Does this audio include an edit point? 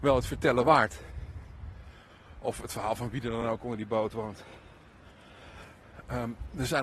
no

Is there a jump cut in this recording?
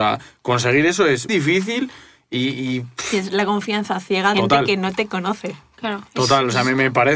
yes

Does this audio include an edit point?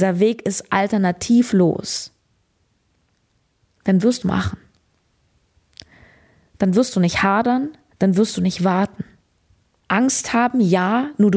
yes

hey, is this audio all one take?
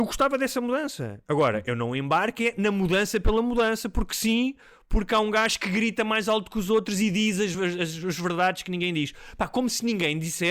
yes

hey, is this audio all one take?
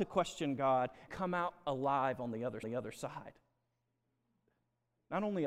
no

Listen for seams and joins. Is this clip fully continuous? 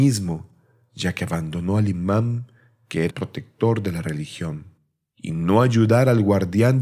no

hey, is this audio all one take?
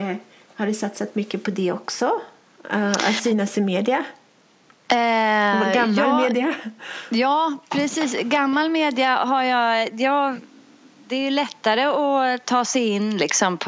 yes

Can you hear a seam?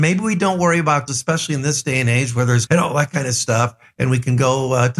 yes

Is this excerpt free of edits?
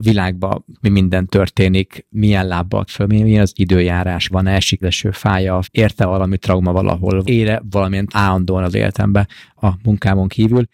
no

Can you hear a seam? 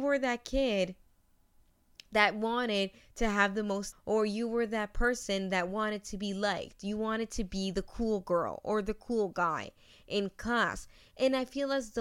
yes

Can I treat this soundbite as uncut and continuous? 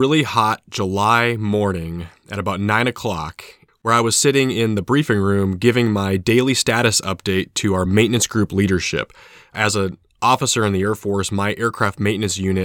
yes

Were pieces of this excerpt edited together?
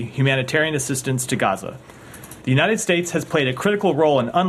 yes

